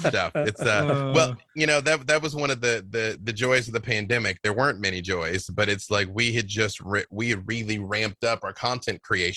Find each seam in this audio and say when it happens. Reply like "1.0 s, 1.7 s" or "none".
none

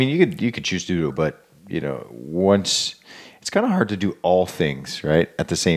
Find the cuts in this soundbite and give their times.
1.1 s

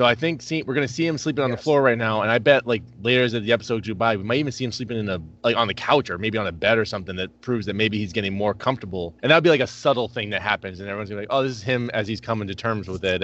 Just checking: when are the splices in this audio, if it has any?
5.4 s, 9.2 s

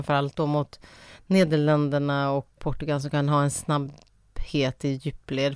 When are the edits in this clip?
2.6 s

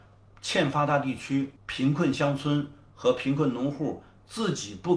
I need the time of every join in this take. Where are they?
1.6 s

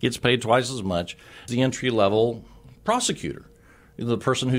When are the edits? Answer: 1.5 s

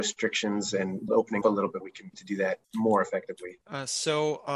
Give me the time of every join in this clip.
1.1 s, 1.4 s, 1.8 s, 2.1 s, 2.6 s, 3.6 s

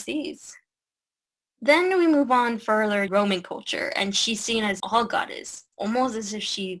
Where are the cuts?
3.1 s, 4.8 s

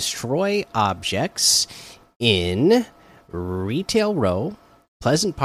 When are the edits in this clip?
none

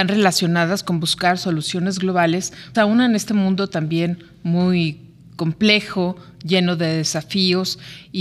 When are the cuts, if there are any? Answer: 2.7 s

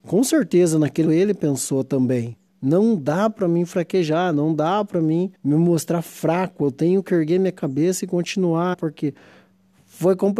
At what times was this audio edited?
1.1 s, 2.5 s, 5.3 s, 8.7 s

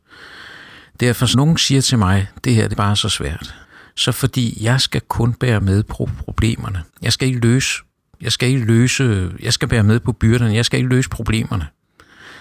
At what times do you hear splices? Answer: 1.3 s, 2.7 s, 3.6 s, 6.9 s

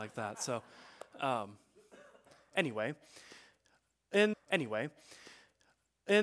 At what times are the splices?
4.3 s

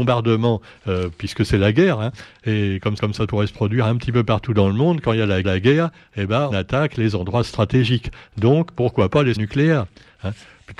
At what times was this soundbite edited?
3.0 s, 5.4 s, 6.5 s, 9.4 s

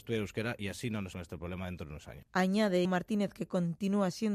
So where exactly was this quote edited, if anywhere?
1.1 s, 2.8 s

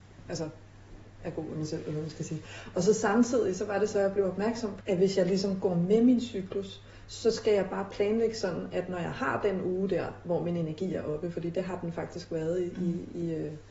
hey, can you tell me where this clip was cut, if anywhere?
1.2 s, 4.8 s

